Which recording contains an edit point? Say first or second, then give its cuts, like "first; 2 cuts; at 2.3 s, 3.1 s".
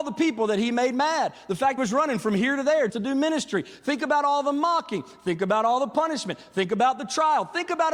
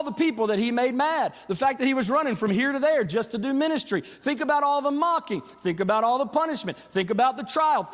first; 2 cuts; at 1.8 s, 2.9 s